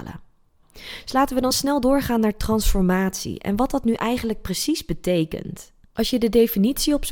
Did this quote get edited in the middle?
no; 0 cuts

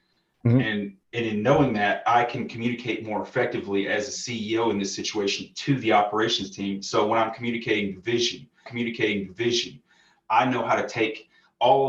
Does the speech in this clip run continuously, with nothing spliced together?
no; 2 cuts; at 1.0 s, 8.7 s

